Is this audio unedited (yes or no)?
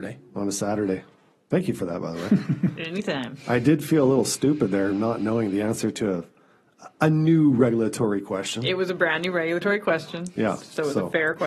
yes